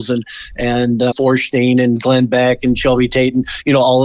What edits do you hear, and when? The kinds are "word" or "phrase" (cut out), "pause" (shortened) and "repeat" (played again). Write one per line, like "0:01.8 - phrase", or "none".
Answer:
0:01.1 - word